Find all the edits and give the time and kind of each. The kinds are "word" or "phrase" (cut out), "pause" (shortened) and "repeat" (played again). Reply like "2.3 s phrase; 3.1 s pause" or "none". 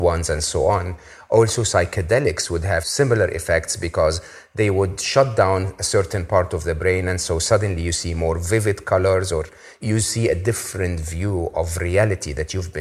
none